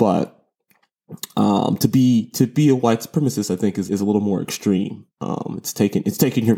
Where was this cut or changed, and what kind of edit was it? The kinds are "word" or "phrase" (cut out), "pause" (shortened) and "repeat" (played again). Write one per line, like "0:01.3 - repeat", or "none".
0:03.9 - word